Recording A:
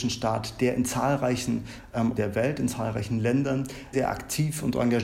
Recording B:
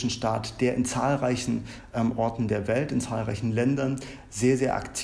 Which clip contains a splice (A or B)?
A